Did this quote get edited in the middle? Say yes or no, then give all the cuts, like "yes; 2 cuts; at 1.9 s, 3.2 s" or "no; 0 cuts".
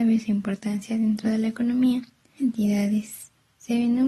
yes; 1 cut; at 2.4 s